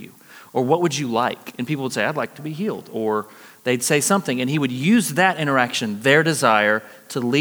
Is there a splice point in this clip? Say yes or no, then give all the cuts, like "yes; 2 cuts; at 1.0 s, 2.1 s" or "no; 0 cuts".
no; 0 cuts